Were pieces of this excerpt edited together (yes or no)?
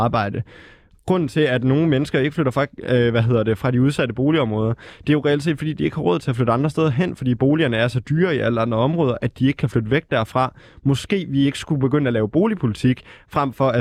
no